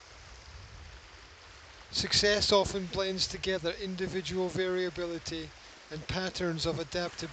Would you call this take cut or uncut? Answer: uncut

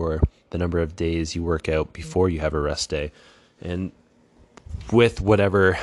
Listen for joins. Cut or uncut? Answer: uncut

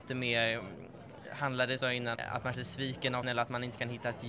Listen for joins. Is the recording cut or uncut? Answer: cut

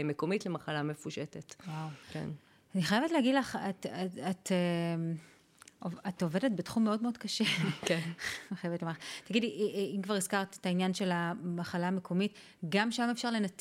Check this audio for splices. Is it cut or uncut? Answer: cut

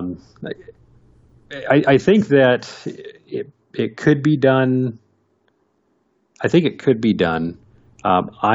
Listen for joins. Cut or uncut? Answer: uncut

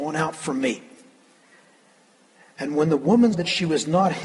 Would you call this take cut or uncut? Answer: cut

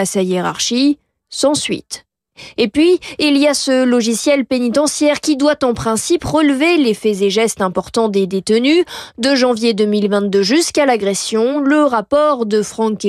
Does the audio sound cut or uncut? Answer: uncut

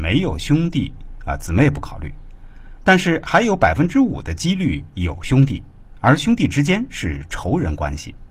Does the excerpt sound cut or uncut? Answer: uncut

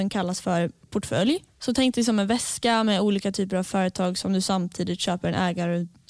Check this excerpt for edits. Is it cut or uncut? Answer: cut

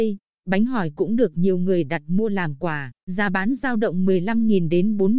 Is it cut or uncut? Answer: cut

